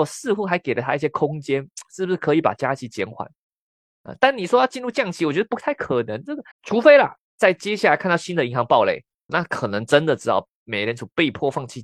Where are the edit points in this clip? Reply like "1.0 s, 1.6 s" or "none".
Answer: 6.5 s, 7.3 s, 9.3 s